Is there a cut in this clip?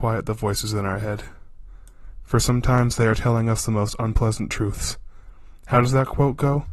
no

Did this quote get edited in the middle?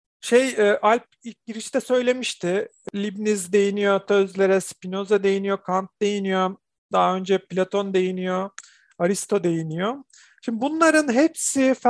no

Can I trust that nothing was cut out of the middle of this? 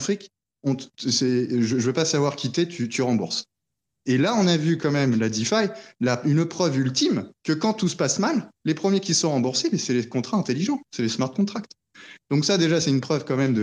no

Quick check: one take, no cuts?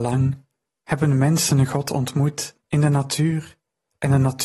no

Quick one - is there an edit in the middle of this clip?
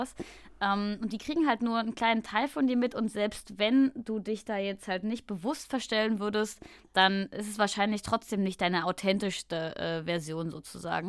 no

